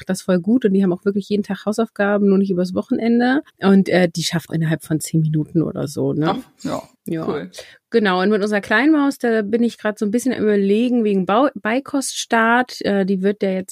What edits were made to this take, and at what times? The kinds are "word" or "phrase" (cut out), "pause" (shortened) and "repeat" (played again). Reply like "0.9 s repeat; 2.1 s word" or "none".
3.5 s pause; 4.5 s phrase; 6.9 s pause